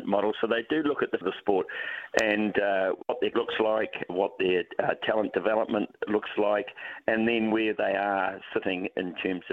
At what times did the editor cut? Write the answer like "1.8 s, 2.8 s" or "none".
1.2 s, 3.3 s, 4.1 s